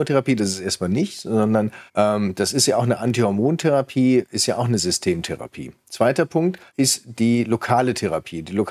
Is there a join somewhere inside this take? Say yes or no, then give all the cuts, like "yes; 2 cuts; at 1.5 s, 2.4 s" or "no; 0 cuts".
yes; 2 cuts; at 1.9 s, 6.7 s